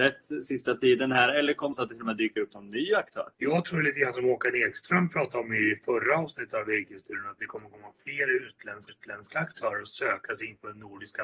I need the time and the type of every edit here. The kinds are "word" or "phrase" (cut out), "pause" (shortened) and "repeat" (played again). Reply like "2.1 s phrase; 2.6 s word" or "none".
1.7 s phrase; 3.3 s pause; 8.9 s repeat